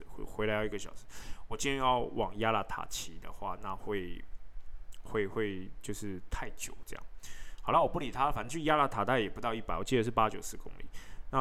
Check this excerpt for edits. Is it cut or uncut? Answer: uncut